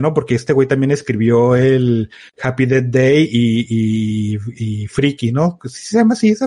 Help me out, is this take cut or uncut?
uncut